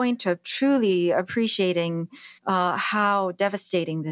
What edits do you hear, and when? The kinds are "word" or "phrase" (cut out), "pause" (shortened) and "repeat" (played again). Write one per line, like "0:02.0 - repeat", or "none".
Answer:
0:02.4 - pause